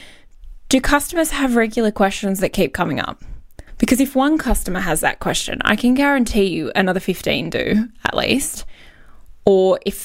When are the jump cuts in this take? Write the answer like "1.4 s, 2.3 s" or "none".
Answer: 3.7 s